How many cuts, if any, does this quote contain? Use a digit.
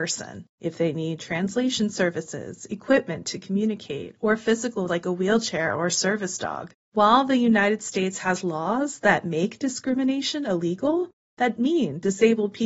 3